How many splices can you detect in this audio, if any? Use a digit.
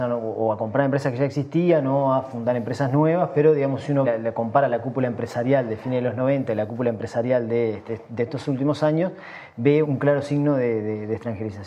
3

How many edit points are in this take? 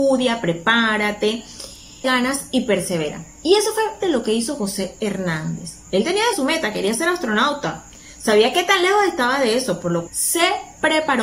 4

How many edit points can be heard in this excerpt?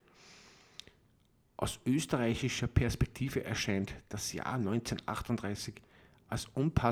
0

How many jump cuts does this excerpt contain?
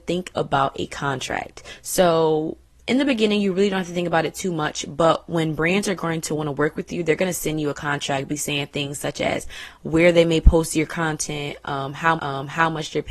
2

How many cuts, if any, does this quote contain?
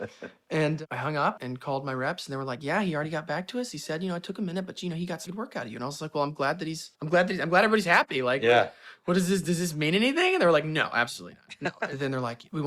3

